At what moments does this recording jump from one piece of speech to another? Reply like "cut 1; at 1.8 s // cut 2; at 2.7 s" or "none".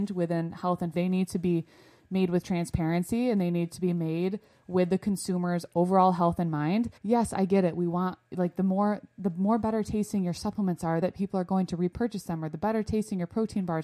cut 1; at 0.9 s // cut 2; at 7.0 s // cut 3; at 11.0 s